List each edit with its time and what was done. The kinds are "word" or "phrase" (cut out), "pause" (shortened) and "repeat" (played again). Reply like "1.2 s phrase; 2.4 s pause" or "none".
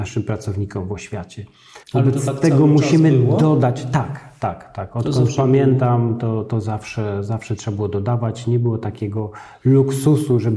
1.8 s pause